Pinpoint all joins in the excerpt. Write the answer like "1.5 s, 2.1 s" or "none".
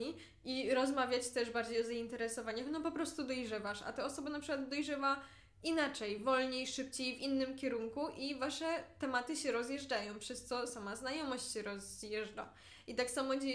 none